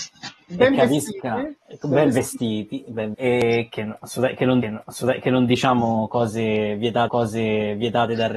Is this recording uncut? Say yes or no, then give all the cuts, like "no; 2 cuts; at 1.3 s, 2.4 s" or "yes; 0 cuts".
no; 4 cuts; at 1.6 s, 3.1 s, 4.6 s, 7.1 s